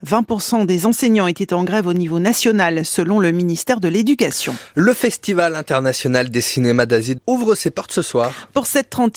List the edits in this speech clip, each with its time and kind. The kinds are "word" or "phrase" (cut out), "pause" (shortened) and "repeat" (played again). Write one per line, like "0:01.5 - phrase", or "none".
0:07.2 - word